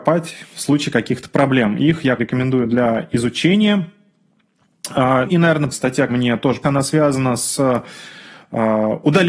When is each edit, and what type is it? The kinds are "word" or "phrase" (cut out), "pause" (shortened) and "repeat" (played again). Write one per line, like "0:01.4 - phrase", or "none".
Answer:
0:02.2 - word
0:05.2 - word
0:05.7 - word
0:06.1 - word
0:06.6 - word

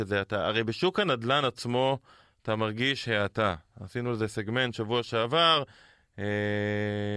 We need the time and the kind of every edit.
none

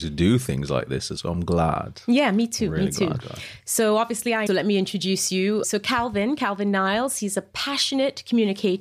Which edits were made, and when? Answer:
0:01.2 - word
0:03.2 - word
0:04.5 - phrase
0:05.6 - word

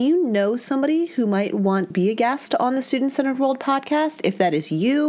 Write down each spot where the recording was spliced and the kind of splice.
0:01.9 - word

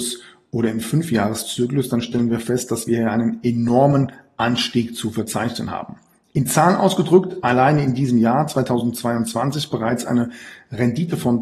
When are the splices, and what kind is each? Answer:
none

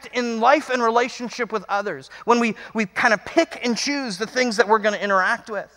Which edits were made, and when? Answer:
none

